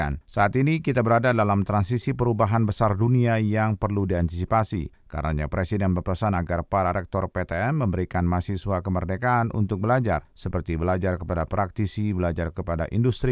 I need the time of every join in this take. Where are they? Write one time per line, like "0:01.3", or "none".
none